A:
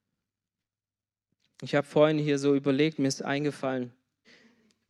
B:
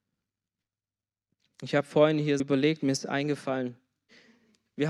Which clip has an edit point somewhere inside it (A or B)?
B